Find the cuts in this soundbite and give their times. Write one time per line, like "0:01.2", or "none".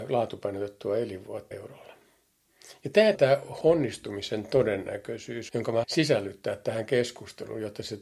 0:01.5
0:03.1
0:03.6
0:05.5
0:05.8